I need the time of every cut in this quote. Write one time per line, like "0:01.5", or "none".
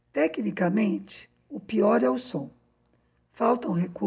none